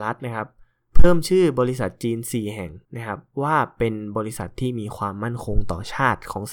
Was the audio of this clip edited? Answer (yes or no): yes